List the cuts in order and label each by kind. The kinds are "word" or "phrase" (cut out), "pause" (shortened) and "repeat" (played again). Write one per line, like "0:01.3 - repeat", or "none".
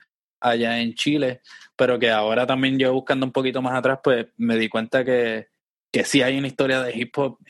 none